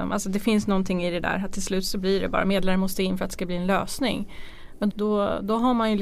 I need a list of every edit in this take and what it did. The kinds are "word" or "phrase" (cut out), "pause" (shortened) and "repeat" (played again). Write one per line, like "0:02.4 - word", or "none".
0:04.9 - word